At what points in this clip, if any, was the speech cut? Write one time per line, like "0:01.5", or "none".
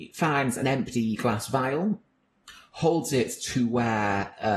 none